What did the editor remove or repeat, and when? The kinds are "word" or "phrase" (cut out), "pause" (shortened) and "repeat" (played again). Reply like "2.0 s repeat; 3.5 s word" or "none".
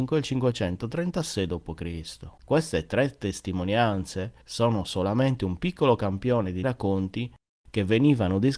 2.4 s pause; 4.4 s pause; 6.6 s word